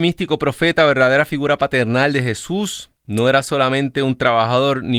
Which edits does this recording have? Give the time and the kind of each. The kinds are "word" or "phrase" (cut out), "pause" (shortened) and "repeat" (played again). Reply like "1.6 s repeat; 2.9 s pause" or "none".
3.0 s pause